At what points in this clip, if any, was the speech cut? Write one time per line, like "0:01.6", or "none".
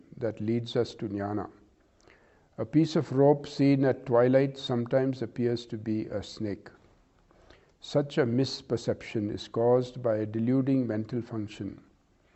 none